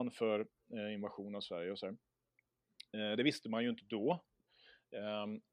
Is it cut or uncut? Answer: uncut